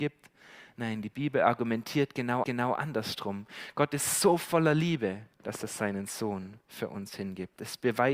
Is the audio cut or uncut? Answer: cut